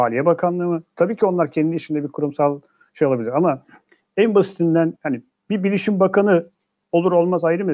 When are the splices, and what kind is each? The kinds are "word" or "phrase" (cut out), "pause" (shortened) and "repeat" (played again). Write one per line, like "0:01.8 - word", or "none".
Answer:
0:05.0 - word